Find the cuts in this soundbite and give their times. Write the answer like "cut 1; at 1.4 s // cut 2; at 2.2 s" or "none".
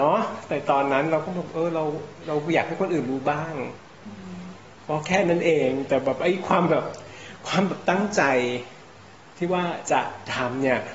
none